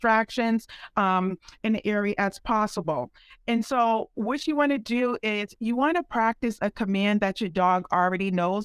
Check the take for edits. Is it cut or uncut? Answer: uncut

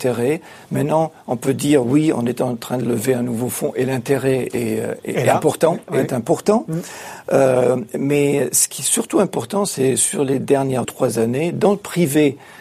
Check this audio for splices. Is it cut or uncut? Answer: cut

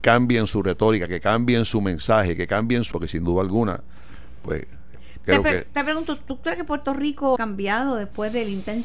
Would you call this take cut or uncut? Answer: cut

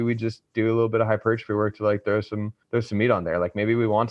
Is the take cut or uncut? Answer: cut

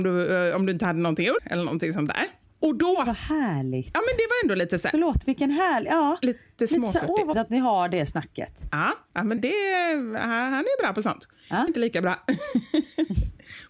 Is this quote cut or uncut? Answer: cut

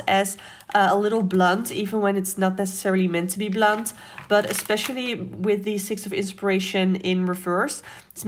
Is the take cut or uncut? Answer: uncut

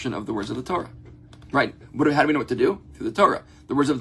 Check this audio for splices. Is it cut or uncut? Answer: cut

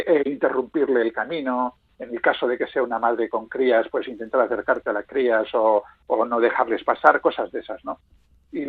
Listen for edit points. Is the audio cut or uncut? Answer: uncut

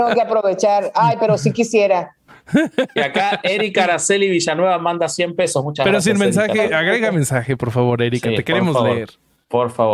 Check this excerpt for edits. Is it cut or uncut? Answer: uncut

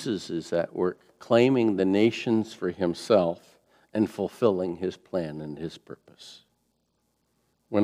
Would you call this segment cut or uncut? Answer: uncut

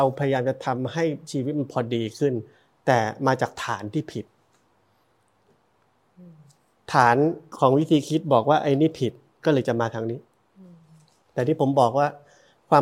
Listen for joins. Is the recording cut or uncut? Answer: uncut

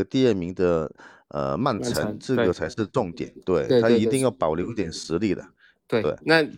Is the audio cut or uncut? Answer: uncut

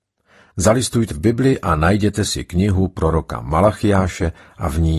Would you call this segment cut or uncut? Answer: cut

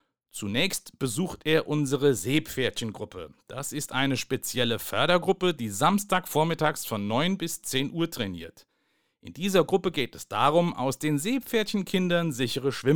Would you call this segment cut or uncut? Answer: uncut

